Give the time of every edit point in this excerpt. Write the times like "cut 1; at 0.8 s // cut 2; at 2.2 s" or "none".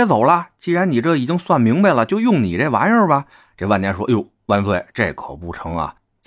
cut 1; at 3.3 s

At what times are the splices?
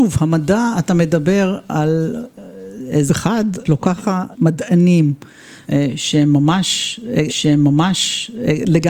cut 1; at 3.1 s // cut 2; at 3.6 s // cut 3; at 4.3 s // cut 4; at 5.6 s // cut 5; at 7.3 s

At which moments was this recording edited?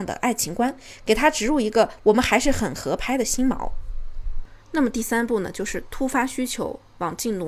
cut 1; at 4.6 s

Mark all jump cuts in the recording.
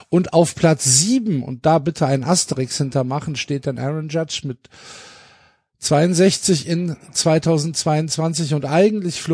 none

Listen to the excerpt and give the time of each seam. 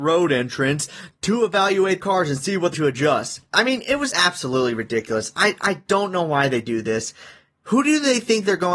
cut 1; at 2.0 s // cut 2; at 2.7 s // cut 3; at 4.1 s

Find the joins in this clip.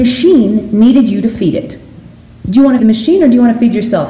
cut 1; at 2.8 s

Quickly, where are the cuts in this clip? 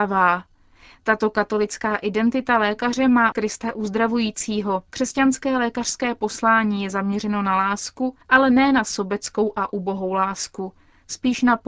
cut 1; at 3.3 s // cut 2; at 4.9 s // cut 3; at 8.2 s

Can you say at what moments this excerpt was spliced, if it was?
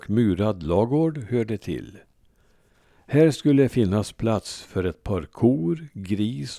none

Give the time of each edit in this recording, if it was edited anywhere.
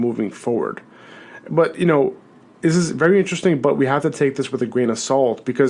none

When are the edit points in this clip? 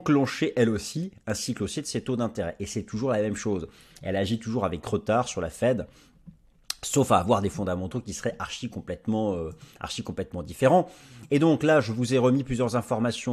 none

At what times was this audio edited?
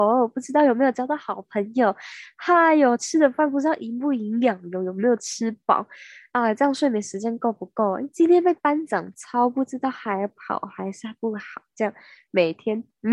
none

